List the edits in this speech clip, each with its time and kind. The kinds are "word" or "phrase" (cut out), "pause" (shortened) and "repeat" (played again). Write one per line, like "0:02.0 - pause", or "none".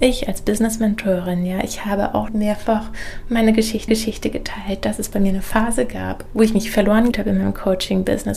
0:02.3 - word
0:03.9 - repeat
0:06.3 - word
0:07.1 - word